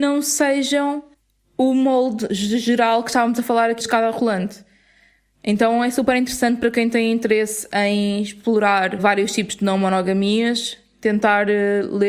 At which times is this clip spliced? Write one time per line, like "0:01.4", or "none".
0:03.8
0:09.0